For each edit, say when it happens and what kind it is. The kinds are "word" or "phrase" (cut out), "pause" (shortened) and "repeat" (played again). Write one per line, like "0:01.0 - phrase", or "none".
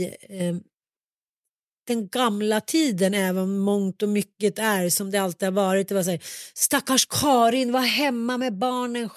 none